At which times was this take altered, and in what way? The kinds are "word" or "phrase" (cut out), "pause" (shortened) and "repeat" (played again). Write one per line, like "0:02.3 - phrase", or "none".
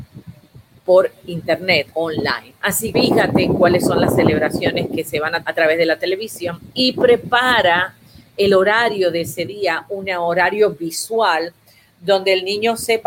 0:01.9 - word
0:02.9 - word
0:05.4 - word